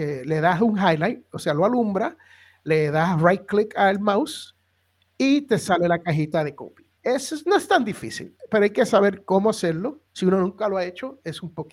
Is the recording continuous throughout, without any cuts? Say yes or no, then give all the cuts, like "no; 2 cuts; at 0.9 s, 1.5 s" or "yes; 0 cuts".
no; 2 cuts; at 7.0 s, 10.1 s